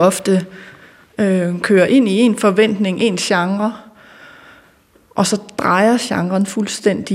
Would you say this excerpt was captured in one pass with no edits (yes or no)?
yes